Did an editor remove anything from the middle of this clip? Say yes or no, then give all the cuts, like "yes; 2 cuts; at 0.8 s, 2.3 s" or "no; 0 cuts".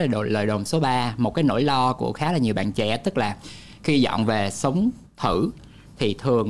yes; 1 cut; at 5.1 s